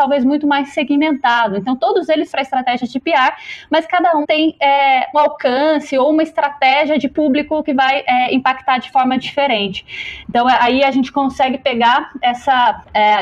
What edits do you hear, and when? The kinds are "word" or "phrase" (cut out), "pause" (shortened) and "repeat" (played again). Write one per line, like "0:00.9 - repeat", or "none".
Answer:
0:02.3 - phrase
0:04.2 - word
0:05.1 - word

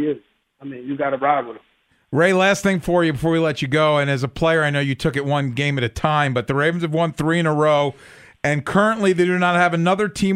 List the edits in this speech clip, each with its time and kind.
0:01.9 - pause

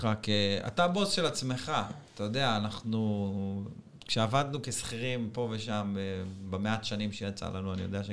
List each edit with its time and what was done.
none

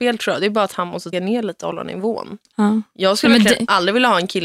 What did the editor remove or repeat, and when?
0:01.1 - word
0:02.4 - pause

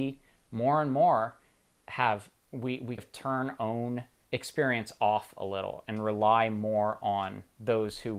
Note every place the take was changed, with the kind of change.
0:02.5 - word
0:03.0 - word
0:03.6 - word
0:04.2 - word

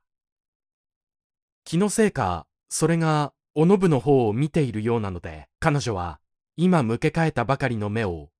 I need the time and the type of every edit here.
0:05.5 - pause

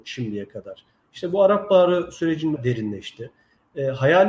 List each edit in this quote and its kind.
0:02.6 - word

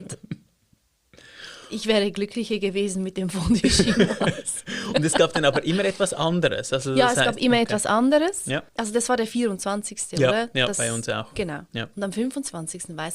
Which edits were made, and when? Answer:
0:08.7 - pause

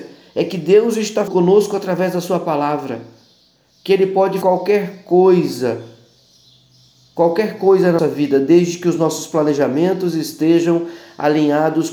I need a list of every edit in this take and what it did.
0:01.3 - word
0:04.4 - word
0:08.0 - word

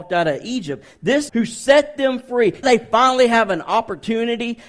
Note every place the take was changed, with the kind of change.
0:01.3 - word
0:02.6 - word

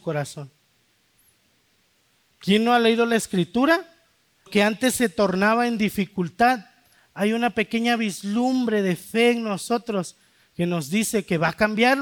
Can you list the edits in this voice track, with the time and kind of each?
0:04.5 - phrase

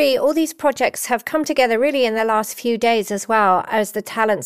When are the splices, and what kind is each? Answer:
none

